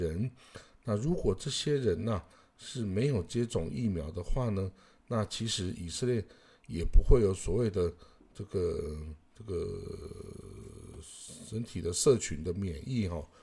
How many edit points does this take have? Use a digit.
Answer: 1